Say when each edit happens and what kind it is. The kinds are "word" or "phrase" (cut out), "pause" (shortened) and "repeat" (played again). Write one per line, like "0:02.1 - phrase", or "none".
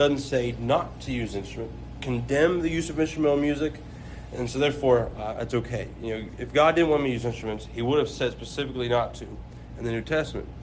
0:02.0 - phrase